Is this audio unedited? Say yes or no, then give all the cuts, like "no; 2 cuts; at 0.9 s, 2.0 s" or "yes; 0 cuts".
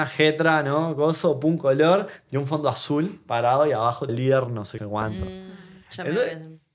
no; 2 cuts; at 4.1 s, 4.8 s